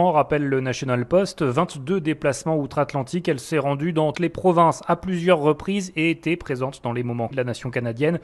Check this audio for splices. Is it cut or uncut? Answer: cut